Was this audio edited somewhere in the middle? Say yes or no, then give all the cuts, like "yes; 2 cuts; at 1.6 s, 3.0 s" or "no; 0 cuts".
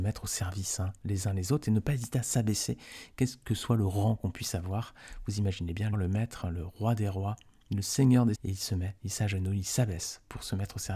yes; 2 cuts; at 5.9 s, 8.3 s